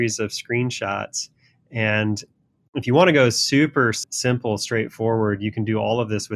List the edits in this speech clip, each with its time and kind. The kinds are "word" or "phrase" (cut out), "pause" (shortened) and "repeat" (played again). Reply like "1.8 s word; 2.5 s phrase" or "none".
none